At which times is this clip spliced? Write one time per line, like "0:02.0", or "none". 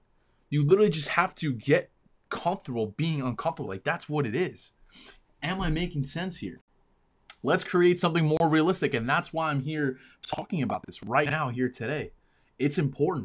none